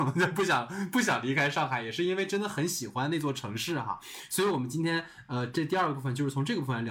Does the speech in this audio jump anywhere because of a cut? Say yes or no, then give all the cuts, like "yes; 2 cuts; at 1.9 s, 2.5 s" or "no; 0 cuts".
no; 0 cuts